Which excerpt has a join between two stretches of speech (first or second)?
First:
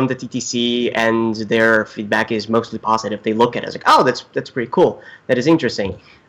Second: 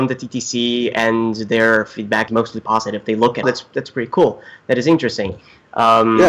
second